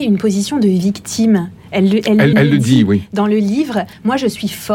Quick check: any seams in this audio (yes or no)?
yes